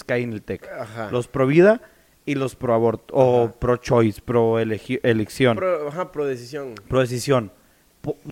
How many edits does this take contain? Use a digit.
0